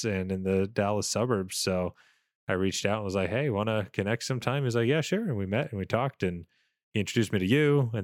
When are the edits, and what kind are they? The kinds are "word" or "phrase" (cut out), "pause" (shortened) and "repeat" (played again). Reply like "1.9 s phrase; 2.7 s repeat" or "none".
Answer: none